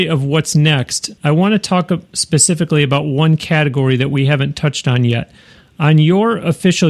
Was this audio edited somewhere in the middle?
yes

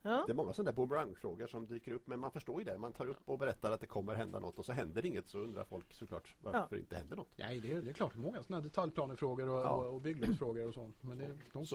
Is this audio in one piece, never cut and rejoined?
no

